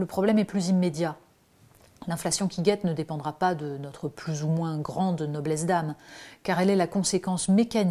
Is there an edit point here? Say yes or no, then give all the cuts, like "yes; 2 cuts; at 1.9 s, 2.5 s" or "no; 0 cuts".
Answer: no; 0 cuts